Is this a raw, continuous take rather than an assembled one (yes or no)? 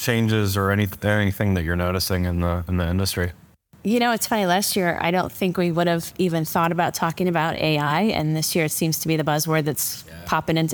yes